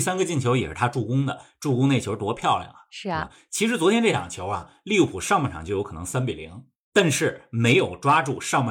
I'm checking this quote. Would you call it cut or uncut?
uncut